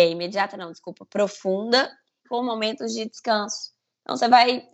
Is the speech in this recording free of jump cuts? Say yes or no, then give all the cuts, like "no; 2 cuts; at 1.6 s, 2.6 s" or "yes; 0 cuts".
no; 1 cut; at 2.2 s